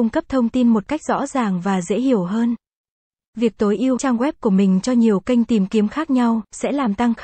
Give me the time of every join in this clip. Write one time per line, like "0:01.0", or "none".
0:04.0